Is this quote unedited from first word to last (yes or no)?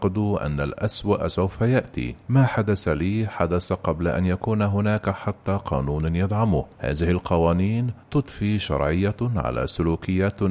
no